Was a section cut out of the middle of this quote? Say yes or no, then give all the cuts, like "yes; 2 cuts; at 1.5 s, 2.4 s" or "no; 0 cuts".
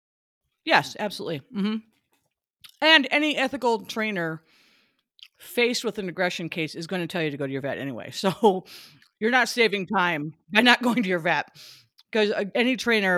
no; 0 cuts